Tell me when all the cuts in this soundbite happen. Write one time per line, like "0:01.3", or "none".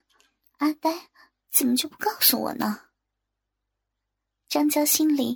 none